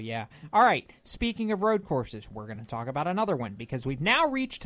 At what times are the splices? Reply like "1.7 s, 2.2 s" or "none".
none